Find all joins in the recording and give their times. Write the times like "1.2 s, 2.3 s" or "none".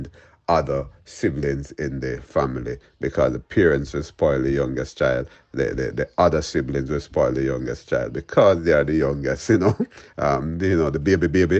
none